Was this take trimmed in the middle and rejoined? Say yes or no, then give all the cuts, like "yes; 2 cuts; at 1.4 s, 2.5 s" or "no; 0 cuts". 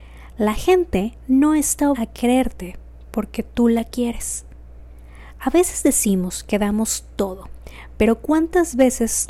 yes; 1 cut; at 1.9 s